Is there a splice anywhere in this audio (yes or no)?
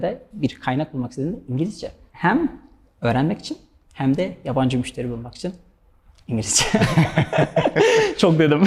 no